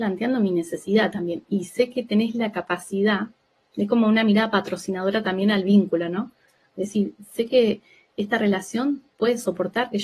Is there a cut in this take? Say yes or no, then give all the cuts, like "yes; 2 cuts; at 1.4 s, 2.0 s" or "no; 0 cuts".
no; 0 cuts